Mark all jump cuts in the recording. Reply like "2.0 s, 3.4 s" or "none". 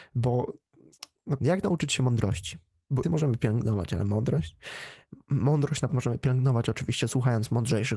1.4 s, 3.0 s, 5.9 s

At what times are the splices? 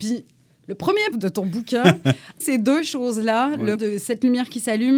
1.1 s, 2.4 s, 3.8 s

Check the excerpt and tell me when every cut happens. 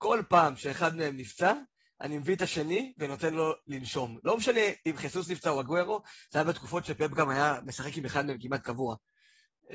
none

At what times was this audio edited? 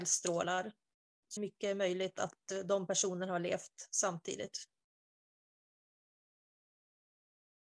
1.4 s

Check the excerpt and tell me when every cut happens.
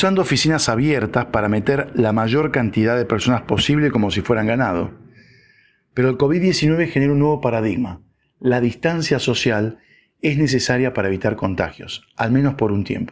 none

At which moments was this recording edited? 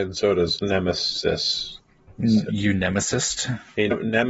2.5 s

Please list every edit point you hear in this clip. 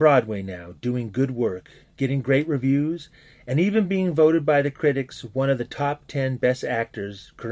none

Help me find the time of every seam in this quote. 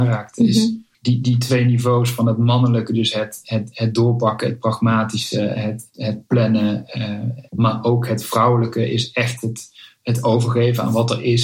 0.9 s, 7.5 s

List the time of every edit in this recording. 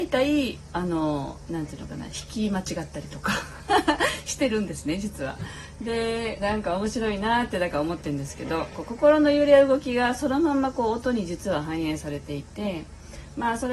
6.4 s

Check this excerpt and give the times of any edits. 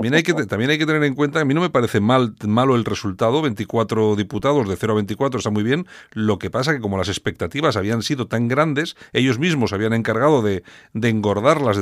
none

